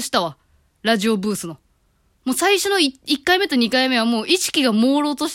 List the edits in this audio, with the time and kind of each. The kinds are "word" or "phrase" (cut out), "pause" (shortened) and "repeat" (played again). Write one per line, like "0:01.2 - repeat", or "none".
none